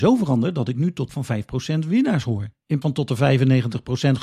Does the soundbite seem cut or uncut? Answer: cut